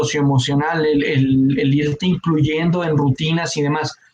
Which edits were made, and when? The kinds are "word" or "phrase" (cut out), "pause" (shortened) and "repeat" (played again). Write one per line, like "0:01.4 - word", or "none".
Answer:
none